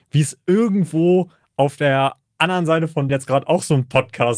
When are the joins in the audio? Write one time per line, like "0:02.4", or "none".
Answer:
0:03.1